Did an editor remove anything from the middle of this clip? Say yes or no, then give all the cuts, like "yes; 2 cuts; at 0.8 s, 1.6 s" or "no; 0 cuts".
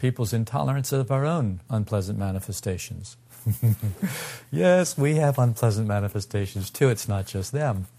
no; 0 cuts